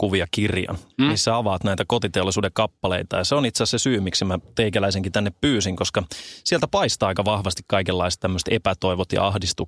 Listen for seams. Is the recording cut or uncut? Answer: cut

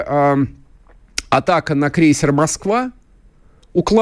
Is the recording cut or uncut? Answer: uncut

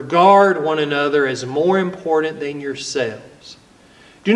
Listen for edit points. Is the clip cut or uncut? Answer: uncut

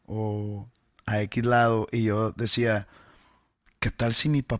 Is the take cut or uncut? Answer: uncut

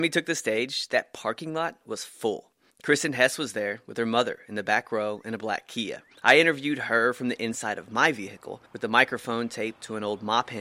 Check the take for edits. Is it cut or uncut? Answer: cut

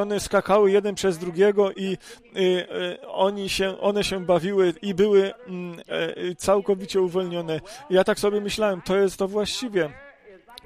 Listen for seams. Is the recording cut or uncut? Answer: uncut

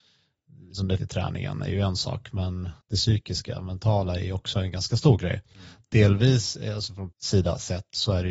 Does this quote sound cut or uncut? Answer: cut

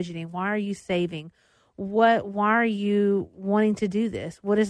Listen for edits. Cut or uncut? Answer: uncut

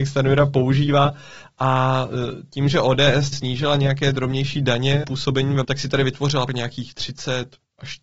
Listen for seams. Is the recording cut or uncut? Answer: cut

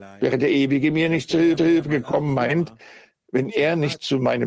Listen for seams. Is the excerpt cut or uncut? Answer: cut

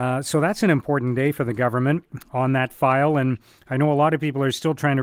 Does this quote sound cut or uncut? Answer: uncut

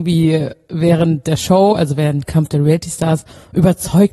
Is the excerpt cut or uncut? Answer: uncut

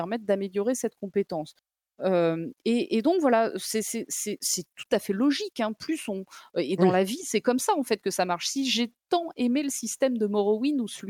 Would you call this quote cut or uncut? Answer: uncut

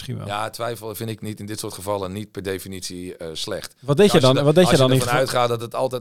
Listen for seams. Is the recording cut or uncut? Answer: uncut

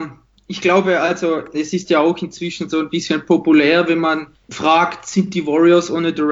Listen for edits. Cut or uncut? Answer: cut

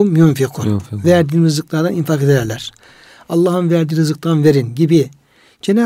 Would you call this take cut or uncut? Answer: uncut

